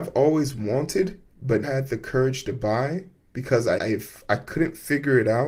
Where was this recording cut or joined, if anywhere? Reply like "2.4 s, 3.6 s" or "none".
1.6 s, 3.8 s